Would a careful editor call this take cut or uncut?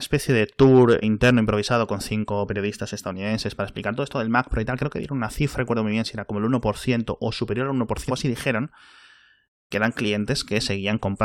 cut